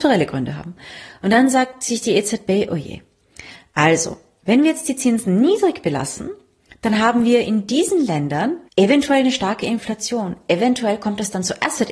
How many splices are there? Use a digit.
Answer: 1